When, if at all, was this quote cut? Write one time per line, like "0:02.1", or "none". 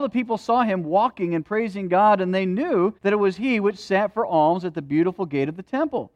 0:03.0